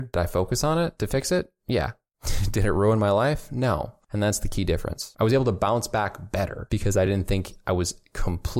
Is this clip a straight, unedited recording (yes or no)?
yes